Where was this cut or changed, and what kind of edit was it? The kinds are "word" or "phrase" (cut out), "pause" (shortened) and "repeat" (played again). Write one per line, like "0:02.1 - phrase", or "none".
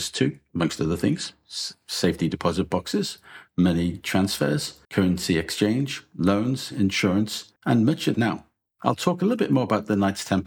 0:04.8 - pause
0:07.6 - pause
0:08.1 - phrase